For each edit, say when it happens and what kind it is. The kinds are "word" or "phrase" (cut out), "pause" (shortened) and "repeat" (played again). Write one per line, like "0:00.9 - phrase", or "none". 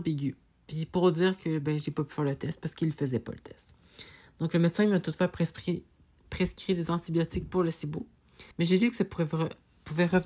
0:08.5 - pause